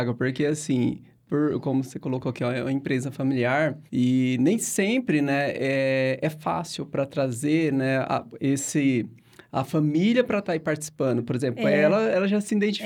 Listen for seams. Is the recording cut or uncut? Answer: cut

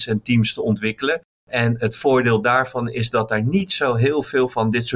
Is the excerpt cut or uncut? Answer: uncut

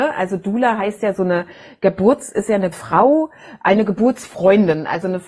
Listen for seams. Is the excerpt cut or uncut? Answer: cut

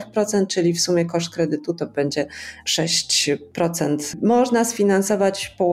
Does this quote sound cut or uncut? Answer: uncut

